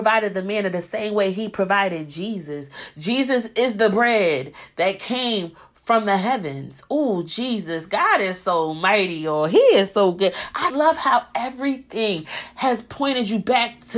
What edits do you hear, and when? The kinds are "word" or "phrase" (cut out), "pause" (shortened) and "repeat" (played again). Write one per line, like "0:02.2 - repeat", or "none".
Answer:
0:10.7 - word

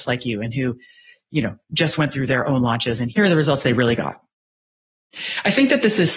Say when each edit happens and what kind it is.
none

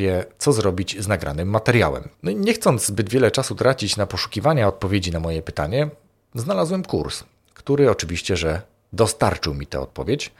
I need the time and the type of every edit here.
none

